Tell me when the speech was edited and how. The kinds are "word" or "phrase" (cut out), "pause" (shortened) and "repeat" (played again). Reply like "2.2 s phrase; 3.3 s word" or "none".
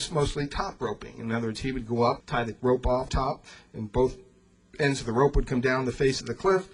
2.2 s word; 2.6 s word; 3.1 s word